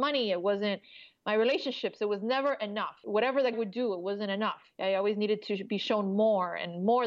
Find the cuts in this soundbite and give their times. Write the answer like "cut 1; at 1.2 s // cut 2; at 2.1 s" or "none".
cut 1; at 3.5 s // cut 2; at 4.7 s

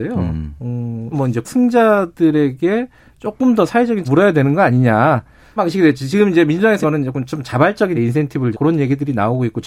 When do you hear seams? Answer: cut 1; at 1.1 s // cut 2; at 1.4 s // cut 3; at 4.0 s // cut 4; at 5.6 s // cut 5; at 6.8 s // cut 6; at 7.9 s // cut 7; at 8.5 s

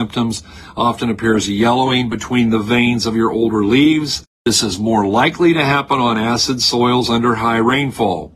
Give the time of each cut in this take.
cut 1; at 4.3 s

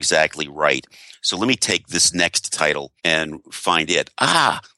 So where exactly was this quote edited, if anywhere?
cut 1; at 3.0 s

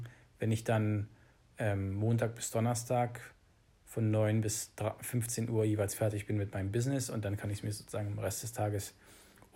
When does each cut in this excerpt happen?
none

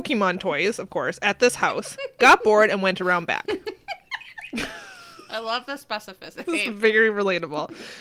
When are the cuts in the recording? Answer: none

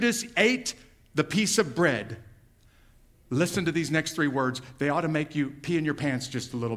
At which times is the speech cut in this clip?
none

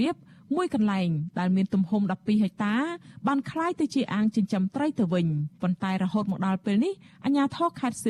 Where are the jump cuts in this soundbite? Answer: cut 1; at 5.5 s

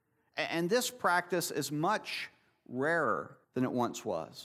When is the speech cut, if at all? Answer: cut 1; at 3.4 s

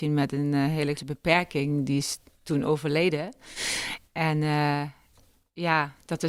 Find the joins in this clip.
cut 1; at 1.0 s

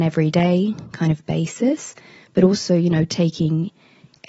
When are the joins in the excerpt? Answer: none

